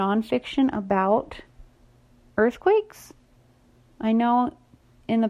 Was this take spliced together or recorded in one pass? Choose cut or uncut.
uncut